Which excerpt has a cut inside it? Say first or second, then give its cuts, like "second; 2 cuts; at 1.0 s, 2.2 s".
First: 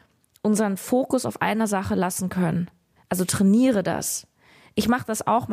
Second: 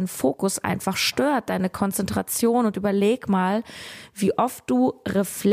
first; 1 cut; at 3.0 s